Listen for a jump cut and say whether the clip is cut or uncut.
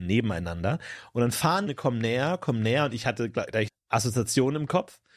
cut